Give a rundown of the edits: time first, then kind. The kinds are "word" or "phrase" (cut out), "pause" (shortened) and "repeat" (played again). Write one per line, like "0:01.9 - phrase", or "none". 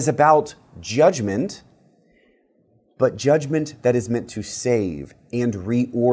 none